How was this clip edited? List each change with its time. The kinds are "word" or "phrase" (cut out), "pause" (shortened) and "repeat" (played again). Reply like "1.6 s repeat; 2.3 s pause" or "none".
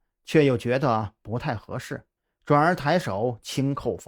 2.2 s pause